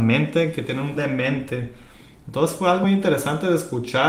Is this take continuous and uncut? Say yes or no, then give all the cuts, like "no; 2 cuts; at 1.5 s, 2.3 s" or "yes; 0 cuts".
no; 2 cuts; at 1.0 s, 2.8 s